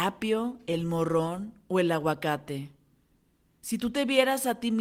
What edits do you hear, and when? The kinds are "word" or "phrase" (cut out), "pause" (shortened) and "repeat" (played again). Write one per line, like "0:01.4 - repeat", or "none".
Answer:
none